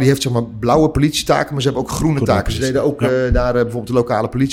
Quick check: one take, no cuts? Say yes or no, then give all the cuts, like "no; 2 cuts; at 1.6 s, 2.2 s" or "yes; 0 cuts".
yes; 0 cuts